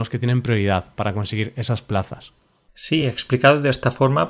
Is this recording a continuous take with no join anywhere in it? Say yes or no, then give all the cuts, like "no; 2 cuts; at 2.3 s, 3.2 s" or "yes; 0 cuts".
yes; 0 cuts